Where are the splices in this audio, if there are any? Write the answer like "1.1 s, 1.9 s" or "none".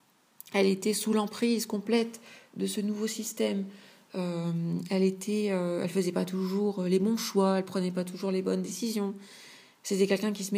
none